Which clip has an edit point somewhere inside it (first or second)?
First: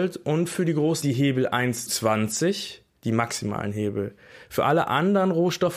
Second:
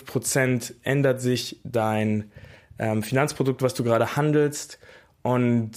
first